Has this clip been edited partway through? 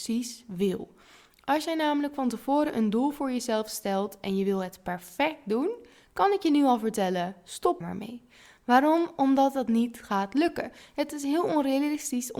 yes; 1 cut; at 7.8 s

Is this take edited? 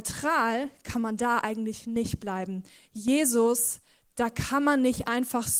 no; 0 cuts

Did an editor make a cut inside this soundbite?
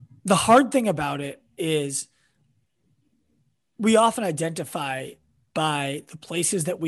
no; 0 cuts

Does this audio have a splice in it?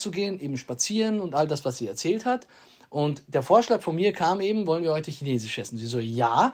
no; 0 cuts

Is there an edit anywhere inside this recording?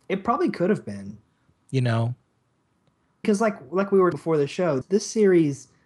yes; 3 cuts; at 3.2 s, 4.1 s, 4.8 s

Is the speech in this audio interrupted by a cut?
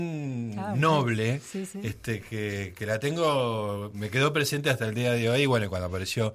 no; 0 cuts

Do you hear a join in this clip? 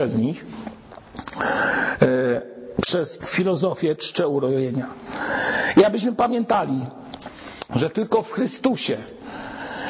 yes; 1 cut; at 3.2 s

